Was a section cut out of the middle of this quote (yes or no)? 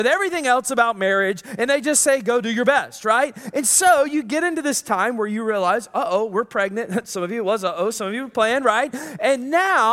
no